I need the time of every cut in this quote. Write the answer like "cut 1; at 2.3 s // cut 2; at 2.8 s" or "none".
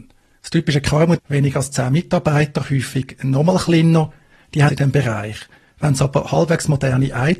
cut 1; at 1.2 s // cut 2; at 4.7 s